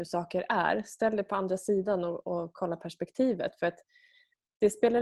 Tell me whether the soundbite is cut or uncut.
uncut